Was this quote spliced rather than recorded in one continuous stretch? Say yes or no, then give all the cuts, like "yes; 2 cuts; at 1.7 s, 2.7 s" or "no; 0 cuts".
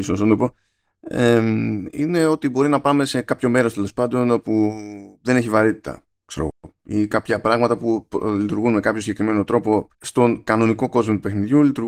yes; 2 cuts; at 5.2 s, 9.9 s